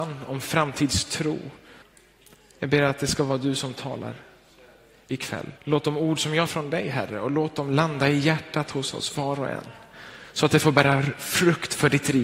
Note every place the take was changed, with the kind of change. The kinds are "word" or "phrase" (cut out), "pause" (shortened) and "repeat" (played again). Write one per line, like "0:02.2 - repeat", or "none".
0:01.8 - pause
0:05.6 - pause
0:06.5 - phrase